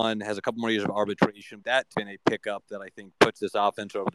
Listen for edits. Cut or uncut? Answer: cut